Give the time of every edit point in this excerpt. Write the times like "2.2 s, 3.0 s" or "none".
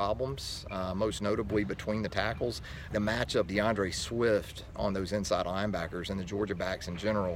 2.9 s, 3.5 s